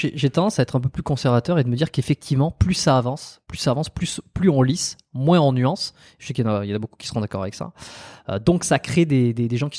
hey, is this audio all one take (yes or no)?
yes